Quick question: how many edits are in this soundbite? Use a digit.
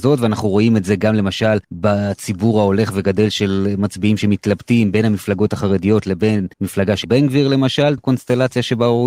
4